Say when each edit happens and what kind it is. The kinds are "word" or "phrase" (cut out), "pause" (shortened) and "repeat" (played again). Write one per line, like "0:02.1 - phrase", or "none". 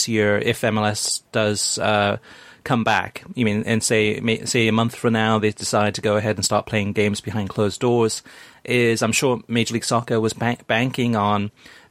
none